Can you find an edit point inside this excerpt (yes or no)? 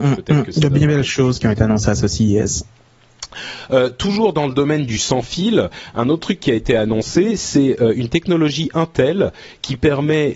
no